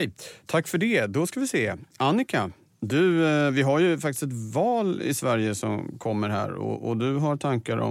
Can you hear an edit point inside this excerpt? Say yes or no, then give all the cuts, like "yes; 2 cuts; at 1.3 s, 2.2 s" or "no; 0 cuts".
no; 0 cuts